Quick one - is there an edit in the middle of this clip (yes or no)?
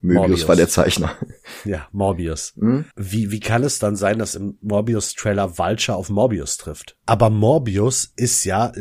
yes